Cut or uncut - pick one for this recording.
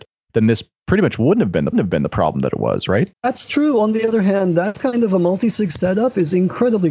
cut